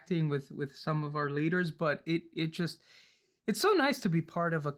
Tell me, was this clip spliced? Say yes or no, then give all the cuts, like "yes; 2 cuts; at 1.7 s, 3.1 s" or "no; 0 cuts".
no; 0 cuts